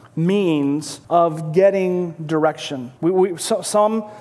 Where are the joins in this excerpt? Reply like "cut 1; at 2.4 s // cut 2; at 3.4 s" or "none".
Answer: cut 1; at 1.0 s // cut 2; at 3.0 s